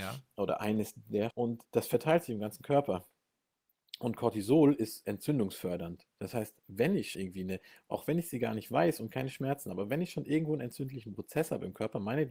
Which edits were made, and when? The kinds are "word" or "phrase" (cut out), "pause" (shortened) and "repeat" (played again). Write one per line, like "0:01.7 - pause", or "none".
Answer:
0:01.3 - word
0:01.6 - word
0:07.1 - word